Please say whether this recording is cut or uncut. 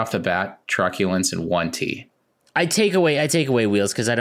uncut